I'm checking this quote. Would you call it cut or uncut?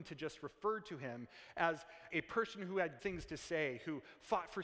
cut